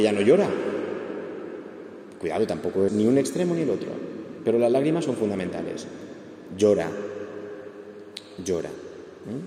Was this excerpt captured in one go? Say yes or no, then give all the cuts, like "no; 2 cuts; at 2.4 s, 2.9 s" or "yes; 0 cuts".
no; 1 cut; at 2.9 s